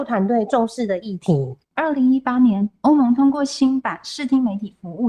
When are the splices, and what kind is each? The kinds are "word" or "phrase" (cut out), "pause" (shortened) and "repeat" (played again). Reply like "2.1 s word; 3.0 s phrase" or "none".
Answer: 1.6 s pause